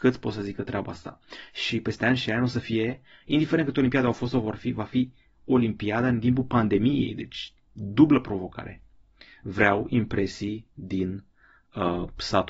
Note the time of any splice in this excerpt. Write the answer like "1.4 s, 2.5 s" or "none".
none